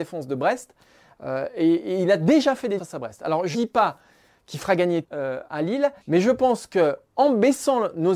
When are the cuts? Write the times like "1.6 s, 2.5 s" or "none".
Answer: 2.8 s, 3.5 s, 5.0 s, 5.5 s, 6.0 s